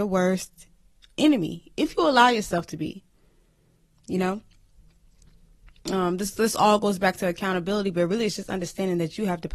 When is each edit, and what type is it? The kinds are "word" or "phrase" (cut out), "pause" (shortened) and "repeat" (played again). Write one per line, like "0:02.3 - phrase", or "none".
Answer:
none